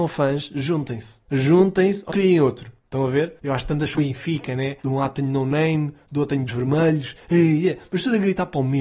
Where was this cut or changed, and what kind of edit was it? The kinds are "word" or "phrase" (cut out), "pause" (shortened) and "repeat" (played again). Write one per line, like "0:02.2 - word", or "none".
0:01.2 - pause
0:02.1 - word
0:02.8 - pause
0:03.4 - pause
0:03.9 - word
0:04.8 - pause
0:06.5 - word